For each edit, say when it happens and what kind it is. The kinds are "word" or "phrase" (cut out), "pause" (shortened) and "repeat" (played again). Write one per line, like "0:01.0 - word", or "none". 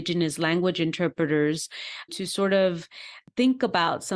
0:02.1 - phrase